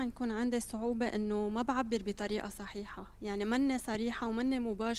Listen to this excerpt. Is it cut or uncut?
uncut